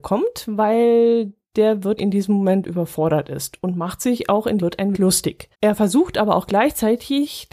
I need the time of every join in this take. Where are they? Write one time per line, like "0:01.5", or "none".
0:02.0
0:04.6
0:04.9
0:05.5